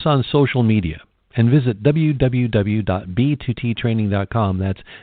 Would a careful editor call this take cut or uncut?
uncut